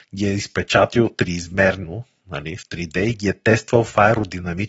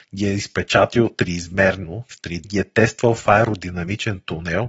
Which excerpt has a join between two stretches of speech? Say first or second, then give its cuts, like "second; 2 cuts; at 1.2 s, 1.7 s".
second; 2 cuts; at 2.1 s, 2.4 s